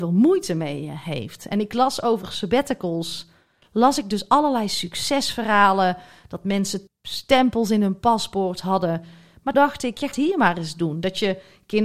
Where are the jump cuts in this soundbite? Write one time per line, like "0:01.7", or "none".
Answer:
0:06.9
0:09.5
0:10.1